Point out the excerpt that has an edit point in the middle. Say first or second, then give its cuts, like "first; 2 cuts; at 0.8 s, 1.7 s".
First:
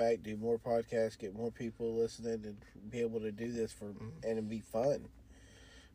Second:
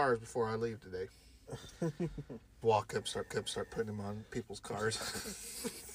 second; 2 cuts; at 2.6 s, 3.3 s